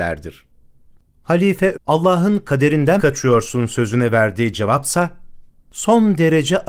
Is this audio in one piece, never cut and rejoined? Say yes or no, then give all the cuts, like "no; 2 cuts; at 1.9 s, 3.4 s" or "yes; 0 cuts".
no; 2 cuts; at 1.7 s, 3.0 s